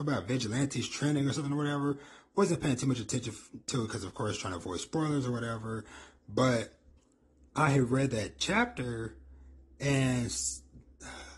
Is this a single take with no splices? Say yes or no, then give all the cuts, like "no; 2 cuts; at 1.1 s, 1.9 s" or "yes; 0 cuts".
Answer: no; 1 cut; at 7.0 s